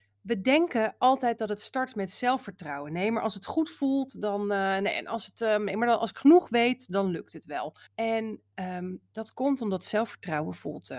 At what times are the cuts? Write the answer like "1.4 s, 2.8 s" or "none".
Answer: 7.9 s